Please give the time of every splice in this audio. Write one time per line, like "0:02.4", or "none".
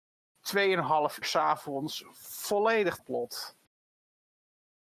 0:01.2
0:03.0